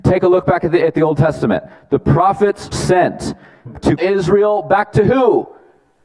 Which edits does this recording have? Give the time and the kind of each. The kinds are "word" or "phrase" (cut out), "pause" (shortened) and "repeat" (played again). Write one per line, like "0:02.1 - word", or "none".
0:02.7 - word
0:03.7 - word
0:04.0 - word